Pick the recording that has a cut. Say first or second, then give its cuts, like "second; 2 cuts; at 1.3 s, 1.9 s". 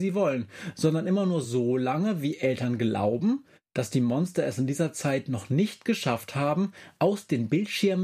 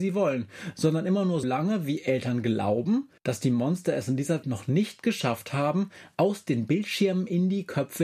second; 3 cuts; at 1.4 s, 3.2 s, 4.4 s